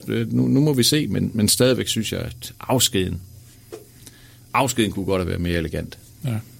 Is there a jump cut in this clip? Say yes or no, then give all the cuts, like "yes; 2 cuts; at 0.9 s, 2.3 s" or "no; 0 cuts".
no; 0 cuts